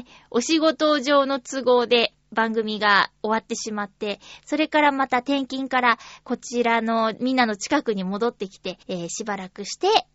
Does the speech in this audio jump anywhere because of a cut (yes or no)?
yes